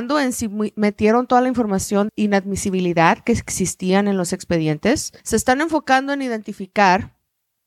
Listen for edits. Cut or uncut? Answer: cut